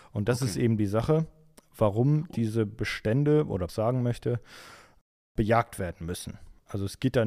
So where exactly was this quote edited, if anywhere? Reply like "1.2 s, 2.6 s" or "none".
3.7 s

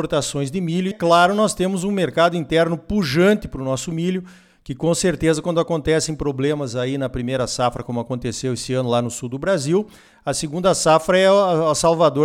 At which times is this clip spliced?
0.9 s

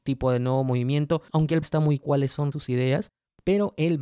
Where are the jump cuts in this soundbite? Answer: 1.3 s, 1.6 s, 2.0 s, 2.5 s

